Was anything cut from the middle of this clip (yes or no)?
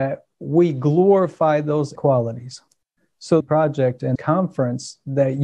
yes